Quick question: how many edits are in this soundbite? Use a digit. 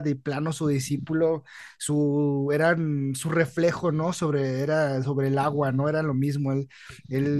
0